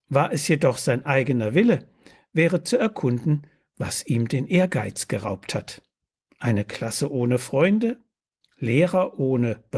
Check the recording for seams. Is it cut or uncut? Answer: uncut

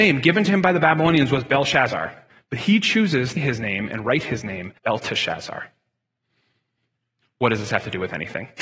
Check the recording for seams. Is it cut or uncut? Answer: cut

